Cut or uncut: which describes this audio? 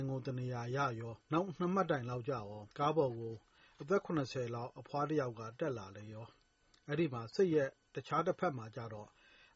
cut